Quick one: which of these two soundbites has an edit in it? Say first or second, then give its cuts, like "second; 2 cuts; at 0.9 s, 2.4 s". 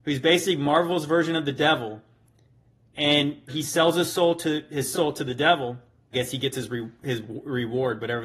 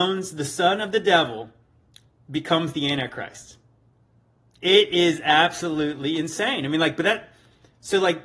first; 3 cuts; at 3.5 s, 4.9 s, 6.1 s